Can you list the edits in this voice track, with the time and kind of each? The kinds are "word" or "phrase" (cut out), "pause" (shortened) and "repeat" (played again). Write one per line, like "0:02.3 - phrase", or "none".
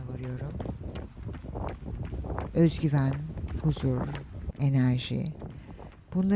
0:03.6 - word
0:04.5 - word